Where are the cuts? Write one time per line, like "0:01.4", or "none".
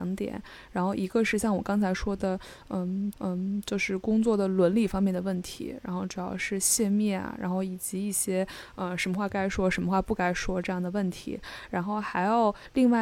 0:03.1